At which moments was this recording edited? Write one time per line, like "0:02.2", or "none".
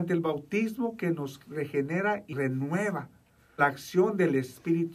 0:02.3
0:03.6

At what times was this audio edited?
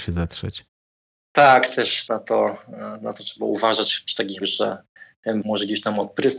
0:02.1
0:04.4
0:05.4

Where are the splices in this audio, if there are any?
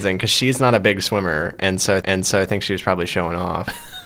0:02.0

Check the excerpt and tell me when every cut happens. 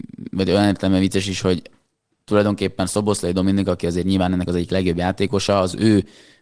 0:04.5

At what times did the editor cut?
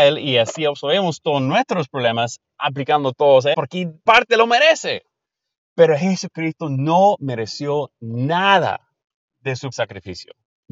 0:03.5
0:04.1
0:09.7

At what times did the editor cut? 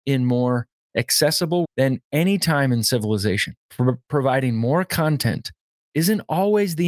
0:01.6
0:03.6

